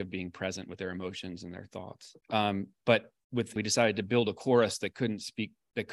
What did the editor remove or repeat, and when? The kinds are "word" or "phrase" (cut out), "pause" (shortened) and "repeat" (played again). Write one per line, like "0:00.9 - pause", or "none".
0:02.2 - pause
0:03.6 - phrase